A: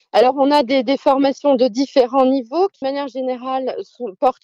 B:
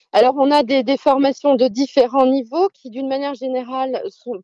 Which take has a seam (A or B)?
A